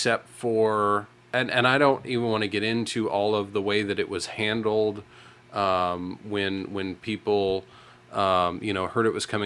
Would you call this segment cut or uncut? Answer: uncut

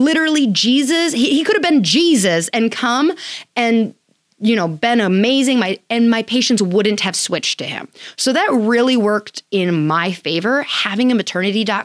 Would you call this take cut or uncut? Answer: uncut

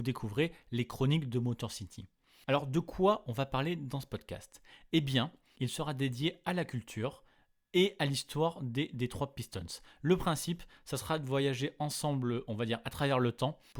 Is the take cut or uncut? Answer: uncut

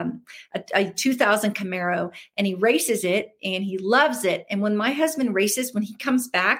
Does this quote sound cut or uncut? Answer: uncut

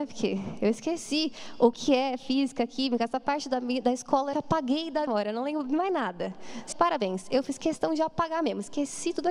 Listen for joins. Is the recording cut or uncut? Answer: cut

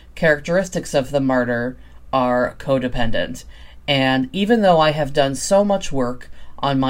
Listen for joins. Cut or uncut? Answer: uncut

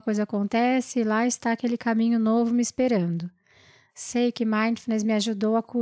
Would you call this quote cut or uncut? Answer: uncut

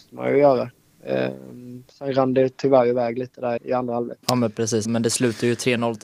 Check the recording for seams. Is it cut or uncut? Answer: cut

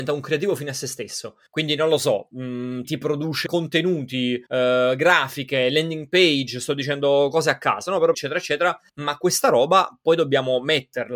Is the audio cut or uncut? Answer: cut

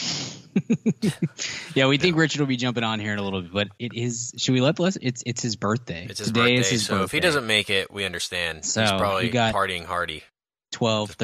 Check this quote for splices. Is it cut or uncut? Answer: uncut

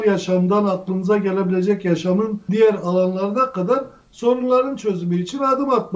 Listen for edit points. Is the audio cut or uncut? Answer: cut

